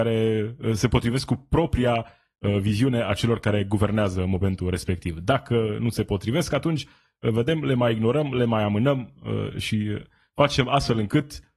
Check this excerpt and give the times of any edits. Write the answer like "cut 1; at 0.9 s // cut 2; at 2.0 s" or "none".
none